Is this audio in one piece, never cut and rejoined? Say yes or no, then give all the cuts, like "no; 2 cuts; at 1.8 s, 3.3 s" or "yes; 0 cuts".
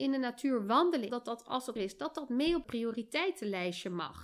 no; 3 cuts; at 1.1 s, 1.8 s, 2.6 s